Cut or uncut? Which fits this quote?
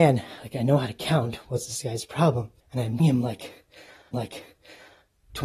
cut